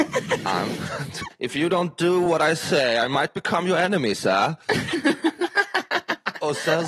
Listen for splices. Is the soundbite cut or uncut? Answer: uncut